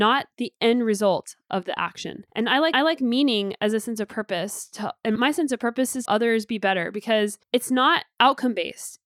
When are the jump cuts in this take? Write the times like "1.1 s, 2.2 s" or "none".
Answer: 2.3 s, 2.7 s, 5.2 s, 6.1 s, 7.4 s